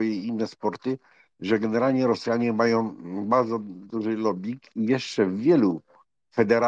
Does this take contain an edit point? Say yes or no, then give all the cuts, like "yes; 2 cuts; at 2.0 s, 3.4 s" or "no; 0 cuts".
no; 0 cuts